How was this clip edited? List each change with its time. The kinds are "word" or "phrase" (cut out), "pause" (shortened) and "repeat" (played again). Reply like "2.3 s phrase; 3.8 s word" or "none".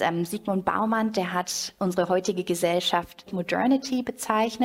3.3 s word